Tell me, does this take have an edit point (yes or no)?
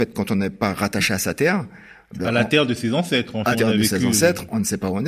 yes